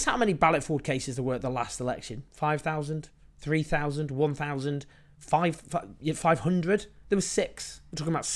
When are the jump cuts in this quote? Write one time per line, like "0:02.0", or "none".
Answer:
none